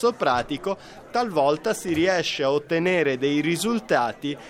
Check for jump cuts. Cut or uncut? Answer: uncut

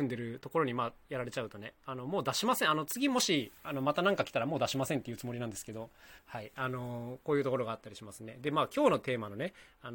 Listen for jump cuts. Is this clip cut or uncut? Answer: cut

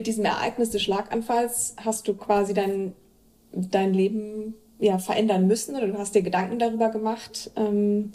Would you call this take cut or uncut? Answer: uncut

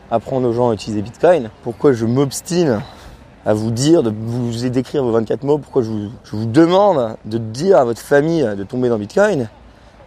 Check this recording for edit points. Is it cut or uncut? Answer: cut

